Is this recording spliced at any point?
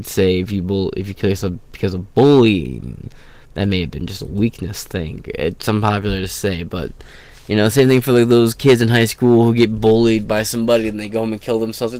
no; 0 cuts

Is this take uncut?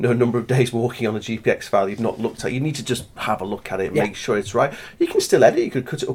yes; 0 cuts

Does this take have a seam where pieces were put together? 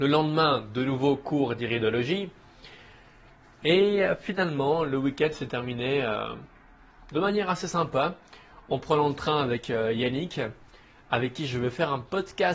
no; 0 cuts

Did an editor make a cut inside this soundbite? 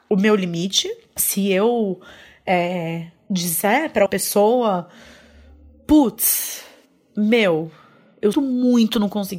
yes; 2 cuts; at 4.1 s, 8.3 s

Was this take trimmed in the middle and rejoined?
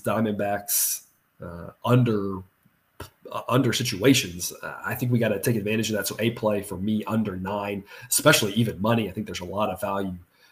no; 0 cuts

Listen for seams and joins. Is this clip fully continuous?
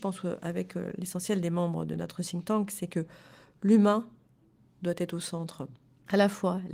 yes; 0 cuts

